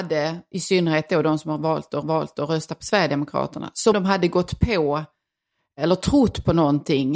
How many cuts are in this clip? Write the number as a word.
two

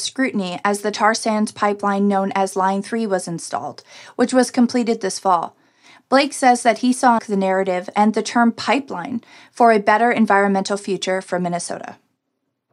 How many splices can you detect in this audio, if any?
one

